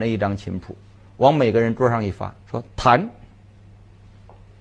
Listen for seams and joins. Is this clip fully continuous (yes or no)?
no